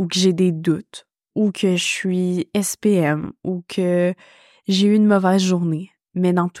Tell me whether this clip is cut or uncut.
uncut